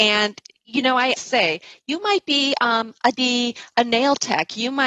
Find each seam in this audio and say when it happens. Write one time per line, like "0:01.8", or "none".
0:01.2
0:03.1